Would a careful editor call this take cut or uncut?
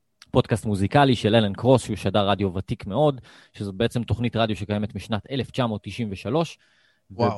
uncut